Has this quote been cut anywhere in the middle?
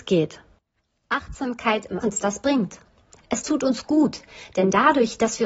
yes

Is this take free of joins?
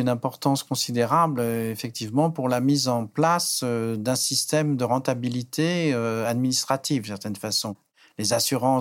yes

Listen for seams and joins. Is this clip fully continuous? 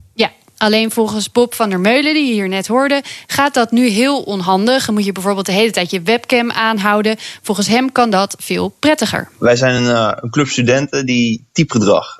yes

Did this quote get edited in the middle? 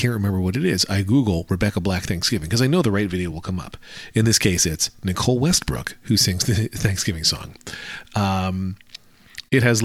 no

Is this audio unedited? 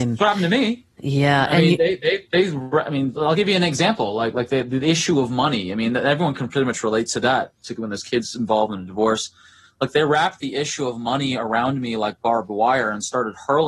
yes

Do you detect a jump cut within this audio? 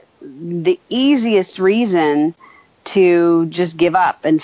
no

